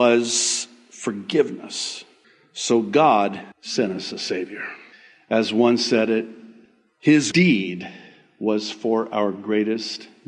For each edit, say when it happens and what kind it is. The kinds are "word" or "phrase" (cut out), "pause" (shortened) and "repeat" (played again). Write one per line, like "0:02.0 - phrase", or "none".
0:02.2 - pause
0:03.5 - pause
0:04.9 - pause
0:07.3 - word